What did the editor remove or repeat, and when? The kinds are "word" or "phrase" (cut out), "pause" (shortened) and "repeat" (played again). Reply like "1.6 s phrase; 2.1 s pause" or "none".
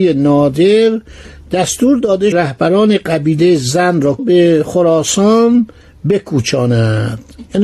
2.3 s phrase; 4.2 s phrase

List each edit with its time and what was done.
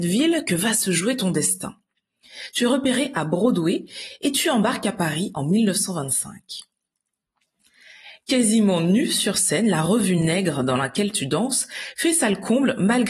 none

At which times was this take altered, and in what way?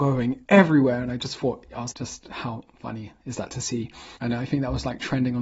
1.9 s word; 4.2 s pause

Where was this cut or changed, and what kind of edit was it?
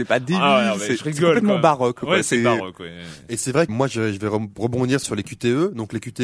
3.7 s word; 5.0 s phrase

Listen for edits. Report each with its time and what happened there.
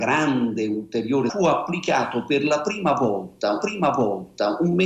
1.3 s word; 3.6 s repeat

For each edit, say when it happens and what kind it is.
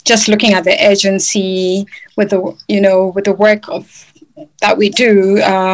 none

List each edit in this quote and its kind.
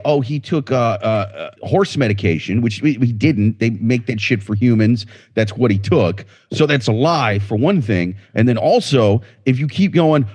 1.6 s pause; 6.5 s word

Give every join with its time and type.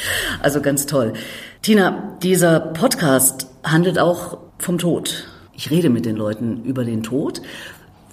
1.6 s pause; 4.5 s pause; 5.5 s pause

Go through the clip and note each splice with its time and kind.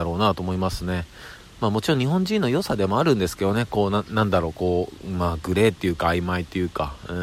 none

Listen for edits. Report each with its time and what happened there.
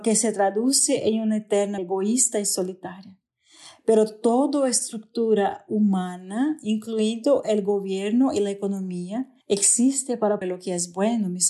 1.8 s word; 9.4 s pause; 10.4 s word

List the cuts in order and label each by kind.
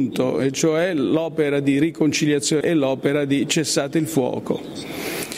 2.6 s word

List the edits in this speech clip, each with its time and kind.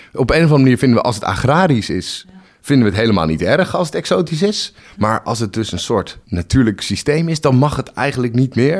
none

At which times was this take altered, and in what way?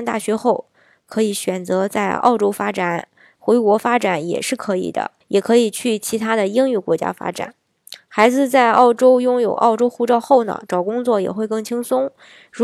5.2 s pause

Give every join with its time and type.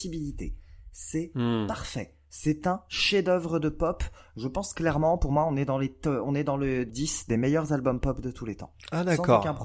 6.9 s phrase

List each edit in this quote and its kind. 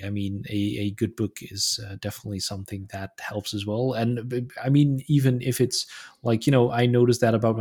none

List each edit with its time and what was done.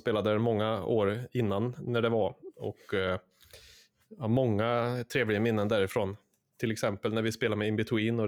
none

